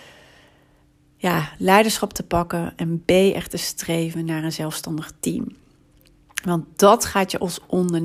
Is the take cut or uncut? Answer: uncut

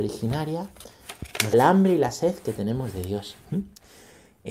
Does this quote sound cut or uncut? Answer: cut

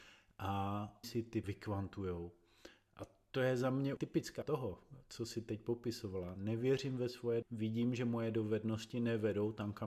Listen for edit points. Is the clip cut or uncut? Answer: cut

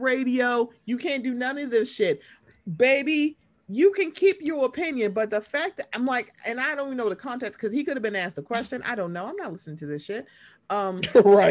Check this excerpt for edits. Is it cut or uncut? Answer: uncut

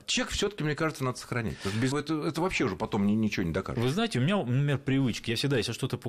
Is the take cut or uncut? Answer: cut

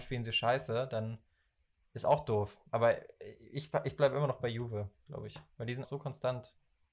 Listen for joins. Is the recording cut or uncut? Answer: cut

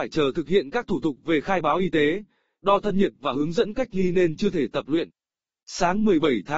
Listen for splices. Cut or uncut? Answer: uncut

